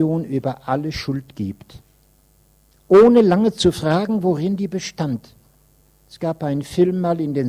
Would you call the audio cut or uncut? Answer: uncut